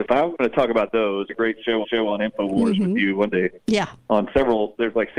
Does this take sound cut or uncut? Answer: cut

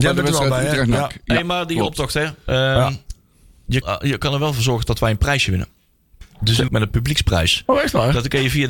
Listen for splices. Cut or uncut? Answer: cut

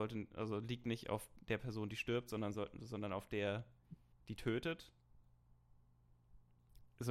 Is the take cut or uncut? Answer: uncut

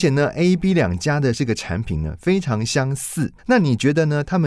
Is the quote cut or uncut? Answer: cut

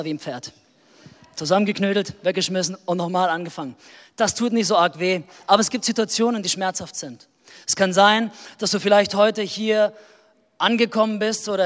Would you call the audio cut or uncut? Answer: uncut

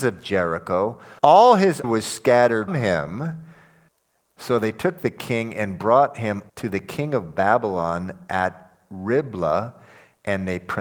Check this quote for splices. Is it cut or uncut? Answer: cut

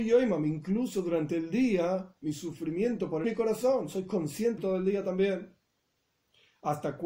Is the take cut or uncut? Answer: cut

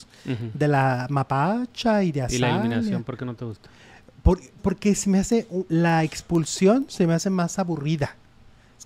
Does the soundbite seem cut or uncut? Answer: cut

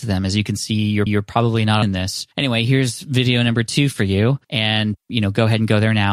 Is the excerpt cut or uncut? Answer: cut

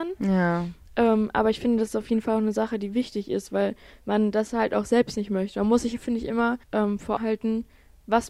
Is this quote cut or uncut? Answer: cut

